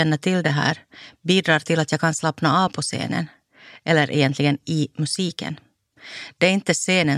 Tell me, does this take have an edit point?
no; 0 cuts

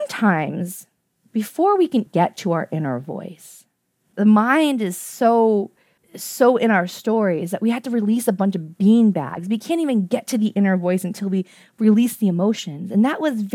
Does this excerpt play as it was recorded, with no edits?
no; 1 cut; at 2.1 s

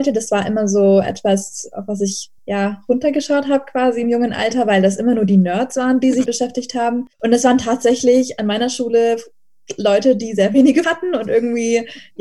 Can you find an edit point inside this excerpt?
yes; 4 cuts; at 2.4 s, 6.3 s, 7.1 s, 10.8 s

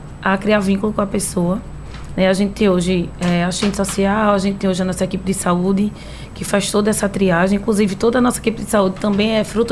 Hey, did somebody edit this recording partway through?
no; 0 cuts

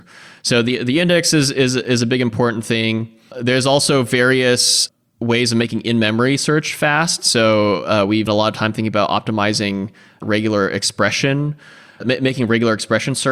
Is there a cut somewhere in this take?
yes; 1 cut; at 8.3 s

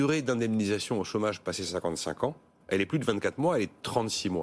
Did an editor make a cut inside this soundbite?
no; 0 cuts

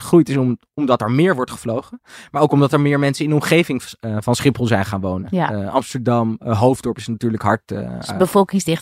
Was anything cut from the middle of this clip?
no; 0 cuts

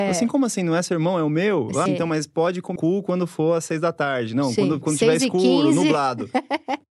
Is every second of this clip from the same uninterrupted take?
no; 2 cuts; at 1.9 s, 2.8 s

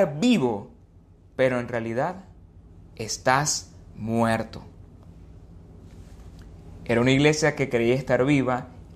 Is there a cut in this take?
no; 0 cuts

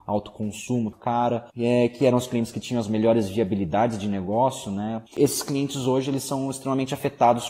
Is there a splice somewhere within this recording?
yes; 3 cuts; at 0.9 s, 1.5 s, 5.1 s

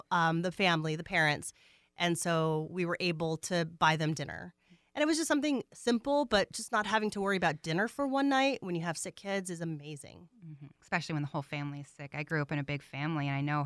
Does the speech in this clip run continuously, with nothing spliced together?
yes; 0 cuts

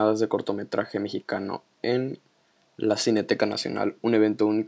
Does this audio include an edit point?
no; 0 cuts

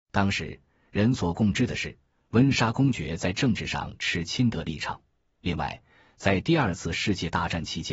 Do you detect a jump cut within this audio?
no; 0 cuts

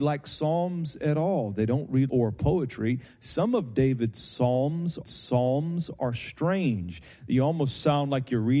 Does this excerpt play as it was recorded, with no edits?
no; 2 cuts; at 2.1 s, 5.0 s

